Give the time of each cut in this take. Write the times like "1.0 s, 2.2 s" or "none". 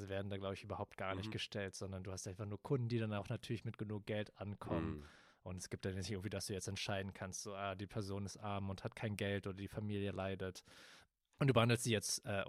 none